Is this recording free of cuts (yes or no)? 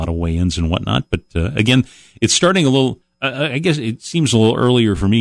yes